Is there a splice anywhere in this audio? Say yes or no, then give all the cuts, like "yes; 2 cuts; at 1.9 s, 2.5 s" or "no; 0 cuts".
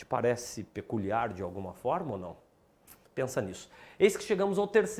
no; 0 cuts